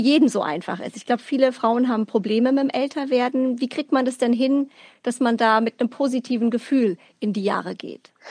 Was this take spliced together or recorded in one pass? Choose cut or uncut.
uncut